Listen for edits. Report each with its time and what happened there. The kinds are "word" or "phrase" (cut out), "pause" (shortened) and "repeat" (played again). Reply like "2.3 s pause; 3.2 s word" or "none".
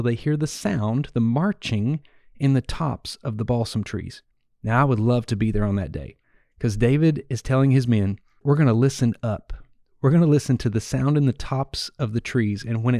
none

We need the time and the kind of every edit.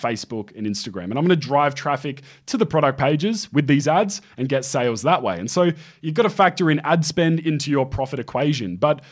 none

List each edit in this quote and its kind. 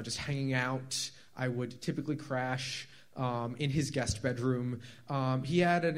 none

